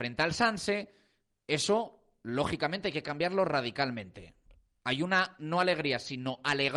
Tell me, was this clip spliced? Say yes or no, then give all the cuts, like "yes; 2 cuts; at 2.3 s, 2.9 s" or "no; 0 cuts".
no; 0 cuts